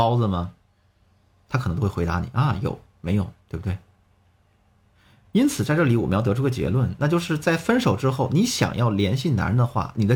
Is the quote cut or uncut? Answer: cut